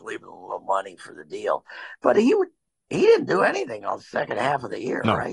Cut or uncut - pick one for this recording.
uncut